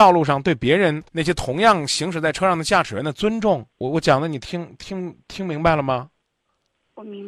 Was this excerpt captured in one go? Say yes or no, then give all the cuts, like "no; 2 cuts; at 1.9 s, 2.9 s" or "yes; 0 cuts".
no; 2 cuts; at 1.1 s, 3.7 s